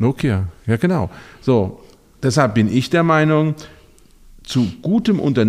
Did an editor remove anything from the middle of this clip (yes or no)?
no